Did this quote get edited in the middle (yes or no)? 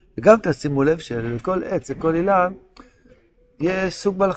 no